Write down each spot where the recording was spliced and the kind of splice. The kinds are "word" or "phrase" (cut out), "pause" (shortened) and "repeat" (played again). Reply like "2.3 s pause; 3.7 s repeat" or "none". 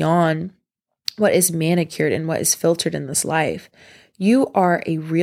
none